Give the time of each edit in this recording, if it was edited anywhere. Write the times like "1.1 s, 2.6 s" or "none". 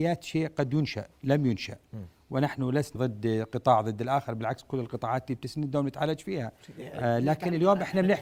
3.0 s